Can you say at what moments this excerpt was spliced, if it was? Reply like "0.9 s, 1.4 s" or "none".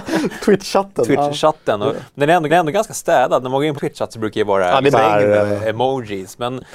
1.9 s, 2.5 s, 3.8 s, 4.9 s, 5.4 s